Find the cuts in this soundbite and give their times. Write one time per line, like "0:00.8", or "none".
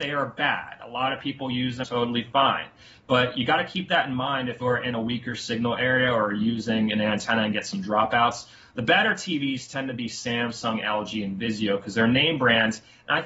0:01.8
0:04.6

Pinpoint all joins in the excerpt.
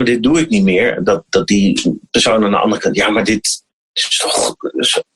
none

